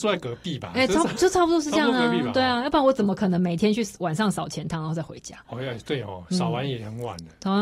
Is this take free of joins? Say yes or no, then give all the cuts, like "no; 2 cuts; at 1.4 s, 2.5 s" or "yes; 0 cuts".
no; 1 cut; at 5.4 s